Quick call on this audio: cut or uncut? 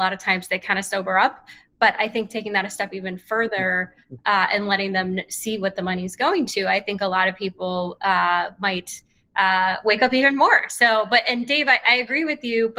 uncut